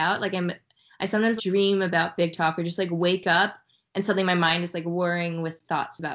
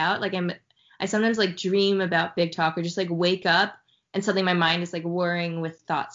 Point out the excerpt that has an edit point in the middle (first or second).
first